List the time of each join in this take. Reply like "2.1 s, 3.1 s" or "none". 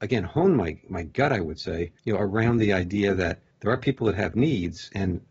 2.0 s, 3.5 s

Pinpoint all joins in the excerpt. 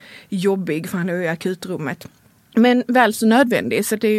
none

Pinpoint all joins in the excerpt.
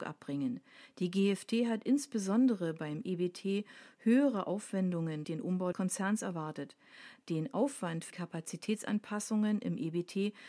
5.2 s, 5.7 s, 8.1 s

